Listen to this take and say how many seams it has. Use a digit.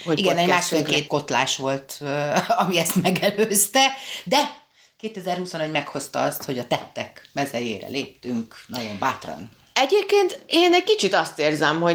1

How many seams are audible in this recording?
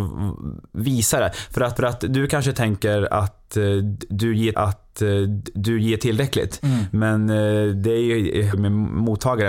3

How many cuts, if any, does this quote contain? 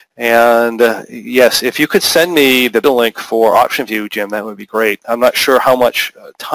1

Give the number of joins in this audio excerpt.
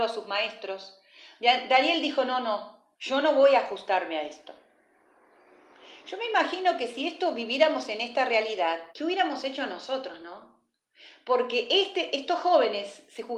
2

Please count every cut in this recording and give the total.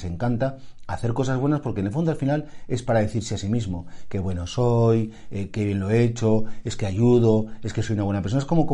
0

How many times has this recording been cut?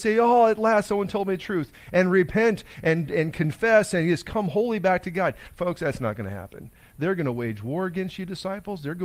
0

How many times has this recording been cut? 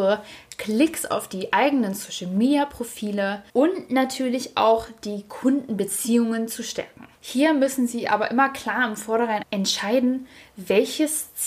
3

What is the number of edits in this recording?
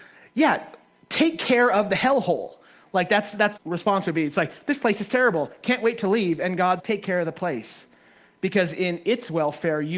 2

